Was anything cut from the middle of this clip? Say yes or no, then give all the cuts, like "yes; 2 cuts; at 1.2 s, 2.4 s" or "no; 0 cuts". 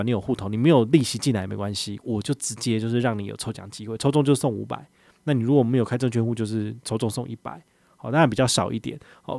no; 0 cuts